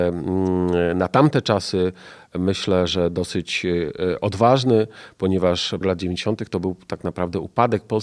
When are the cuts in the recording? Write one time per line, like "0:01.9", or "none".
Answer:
0:05.8